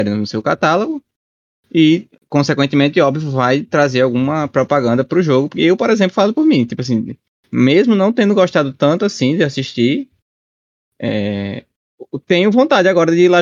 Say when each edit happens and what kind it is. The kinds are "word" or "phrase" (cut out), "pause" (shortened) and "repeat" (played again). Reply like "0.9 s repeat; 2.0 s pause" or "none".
none